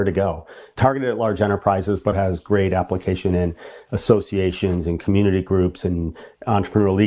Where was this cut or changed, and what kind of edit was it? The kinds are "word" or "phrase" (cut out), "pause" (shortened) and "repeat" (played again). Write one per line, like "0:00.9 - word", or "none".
0:02.1 - word